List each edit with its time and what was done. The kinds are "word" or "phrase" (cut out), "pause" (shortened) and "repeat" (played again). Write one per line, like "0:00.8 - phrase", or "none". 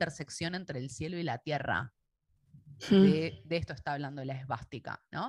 none